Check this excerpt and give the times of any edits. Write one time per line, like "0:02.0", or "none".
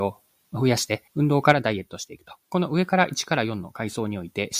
0:01.1
0:02.4